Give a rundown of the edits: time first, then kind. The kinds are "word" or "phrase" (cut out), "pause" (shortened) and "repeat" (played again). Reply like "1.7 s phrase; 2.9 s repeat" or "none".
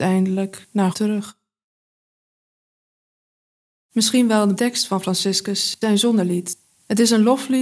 0.9 s word; 4.6 s word; 5.8 s word